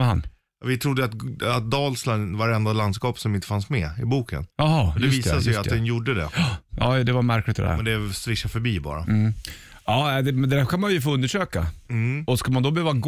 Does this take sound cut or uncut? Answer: cut